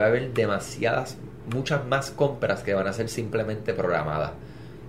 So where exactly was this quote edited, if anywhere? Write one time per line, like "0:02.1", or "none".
none